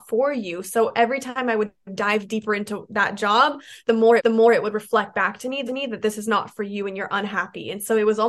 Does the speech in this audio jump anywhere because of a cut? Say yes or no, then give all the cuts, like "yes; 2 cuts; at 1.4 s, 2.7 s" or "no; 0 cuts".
yes; 3 cuts; at 1.8 s, 4.2 s, 5.7 s